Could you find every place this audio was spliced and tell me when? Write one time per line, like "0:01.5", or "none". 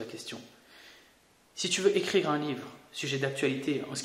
none